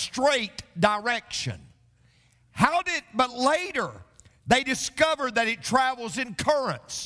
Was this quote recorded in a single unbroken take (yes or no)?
yes